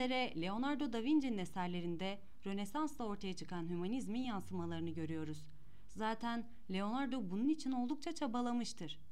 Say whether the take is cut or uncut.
uncut